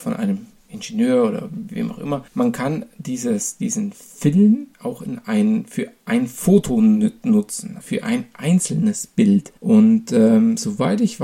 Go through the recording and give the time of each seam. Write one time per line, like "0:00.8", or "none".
0:02.3
0:04.7
0:07.8
0:09.6